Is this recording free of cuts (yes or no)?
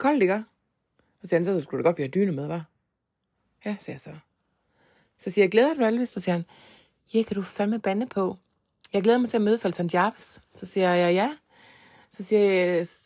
yes